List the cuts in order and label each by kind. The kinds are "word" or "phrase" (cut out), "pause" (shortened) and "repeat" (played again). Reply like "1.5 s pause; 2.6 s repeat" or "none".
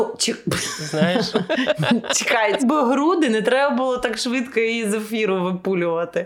2.6 s phrase